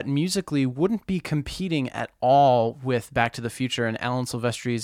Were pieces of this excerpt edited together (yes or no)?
no